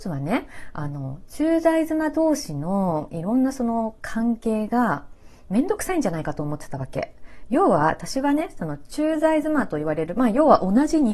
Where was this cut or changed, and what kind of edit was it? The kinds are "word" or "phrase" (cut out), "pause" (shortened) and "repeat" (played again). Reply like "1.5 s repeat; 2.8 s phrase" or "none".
none